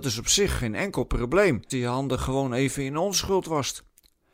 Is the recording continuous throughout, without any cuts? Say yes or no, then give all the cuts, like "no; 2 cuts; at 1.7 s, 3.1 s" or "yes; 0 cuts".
no; 1 cut; at 1.7 s